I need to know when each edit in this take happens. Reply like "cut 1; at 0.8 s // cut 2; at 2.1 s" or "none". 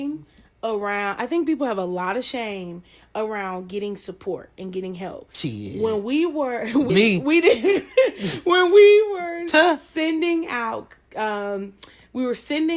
cut 1; at 6.9 s